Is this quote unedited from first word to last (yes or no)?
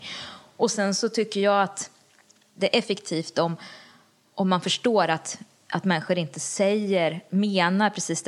yes